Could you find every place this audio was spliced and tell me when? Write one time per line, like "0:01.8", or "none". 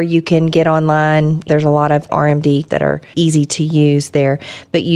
0:01.5
0:02.1
0:02.7
0:03.1